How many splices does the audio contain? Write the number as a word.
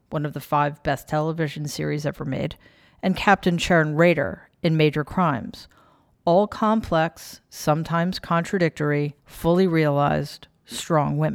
one